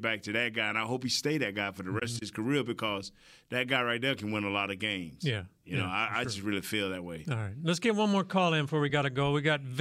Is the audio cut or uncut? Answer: uncut